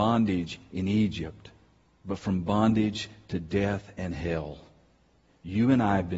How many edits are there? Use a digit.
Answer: 0